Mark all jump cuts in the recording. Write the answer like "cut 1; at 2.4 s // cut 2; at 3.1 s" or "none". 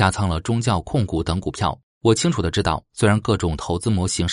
cut 1; at 1.9 s